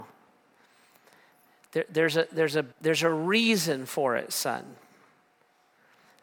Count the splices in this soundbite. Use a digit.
1